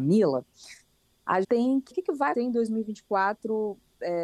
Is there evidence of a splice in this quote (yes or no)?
yes